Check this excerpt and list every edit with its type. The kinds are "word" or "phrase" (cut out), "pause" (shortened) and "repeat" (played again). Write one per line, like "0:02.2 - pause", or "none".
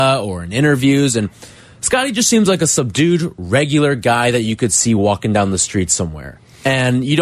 none